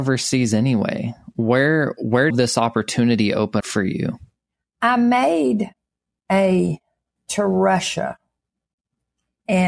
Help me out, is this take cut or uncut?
cut